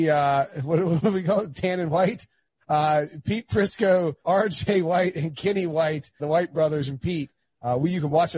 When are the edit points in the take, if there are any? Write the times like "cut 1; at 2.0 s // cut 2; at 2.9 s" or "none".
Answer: cut 1; at 4.2 s // cut 2; at 6.2 s